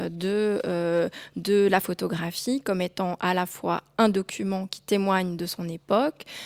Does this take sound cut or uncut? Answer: uncut